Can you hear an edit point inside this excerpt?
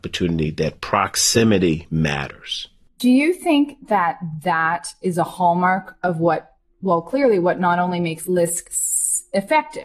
no; 0 cuts

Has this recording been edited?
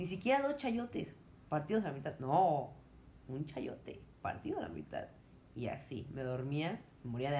no; 0 cuts

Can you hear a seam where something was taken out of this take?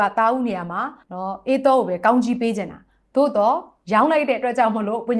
yes; 1 cut; at 1.0 s

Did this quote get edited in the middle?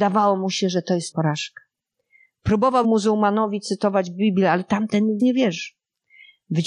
yes; 3 cuts; at 1.1 s, 2.8 s, 5.2 s

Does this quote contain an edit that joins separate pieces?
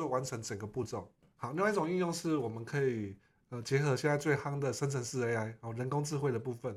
no; 0 cuts

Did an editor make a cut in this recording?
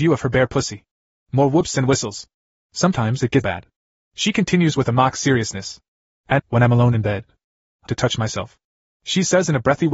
yes; 3 cuts; at 3.4 s, 6.4 s, 7.9 s

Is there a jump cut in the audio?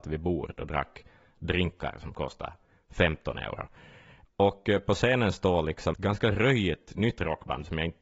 yes; 1 cut; at 5.9 s

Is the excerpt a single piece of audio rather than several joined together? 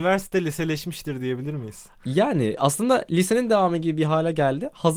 yes; 0 cuts

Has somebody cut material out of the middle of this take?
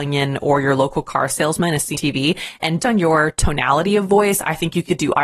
yes; 2 cuts; at 1.9 s, 2.8 s

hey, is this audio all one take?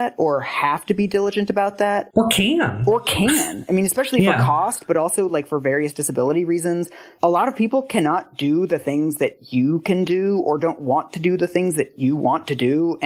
yes; 0 cuts

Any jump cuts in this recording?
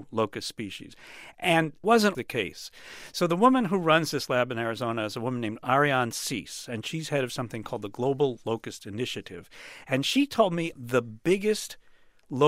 yes; 3 cuts; at 1.8 s, 2.1 s, 10.7 s

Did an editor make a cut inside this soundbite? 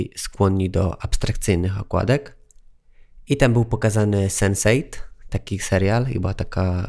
no; 0 cuts

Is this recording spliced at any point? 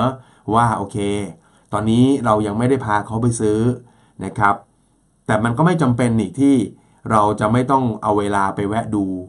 no; 0 cuts

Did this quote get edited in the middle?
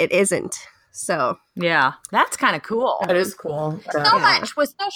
yes; 2 cuts; at 1.5 s, 3.9 s

